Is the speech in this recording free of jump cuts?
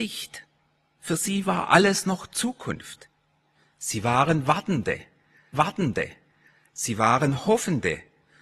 no; 1 cut; at 5.5 s

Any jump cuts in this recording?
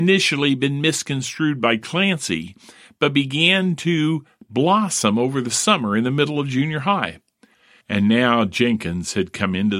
no; 0 cuts

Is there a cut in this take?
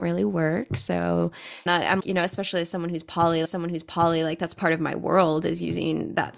yes; 3 cuts; at 1.7 s, 2.0 s, 3.4 s

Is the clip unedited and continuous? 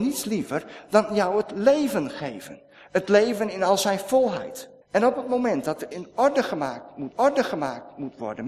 no; 3 cuts; at 4.8 s, 5.9 s, 7.1 s

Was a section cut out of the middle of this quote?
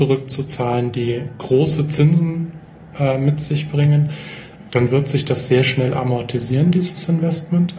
no; 0 cuts

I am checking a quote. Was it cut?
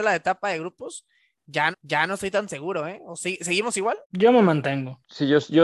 yes; 2 cuts; at 1.7 s, 4.0 s

